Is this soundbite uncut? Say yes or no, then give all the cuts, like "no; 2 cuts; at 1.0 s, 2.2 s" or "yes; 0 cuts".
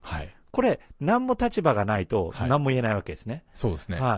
yes; 0 cuts